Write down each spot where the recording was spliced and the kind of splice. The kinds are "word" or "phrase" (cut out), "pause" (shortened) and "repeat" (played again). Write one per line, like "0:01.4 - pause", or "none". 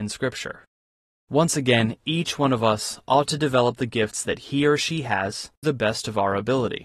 0:05.6 - word